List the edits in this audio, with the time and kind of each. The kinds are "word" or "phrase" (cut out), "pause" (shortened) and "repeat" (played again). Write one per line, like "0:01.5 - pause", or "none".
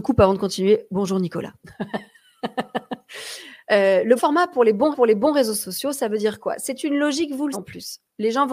0:04.2 - word
0:04.9 - repeat
0:07.5 - word